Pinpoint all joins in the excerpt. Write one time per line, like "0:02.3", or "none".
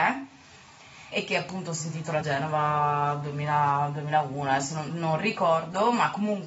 0:01.1
0:02.2
0:04.9